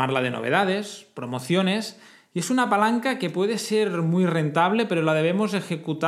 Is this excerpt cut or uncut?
uncut